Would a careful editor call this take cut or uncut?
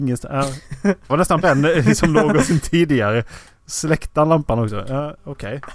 cut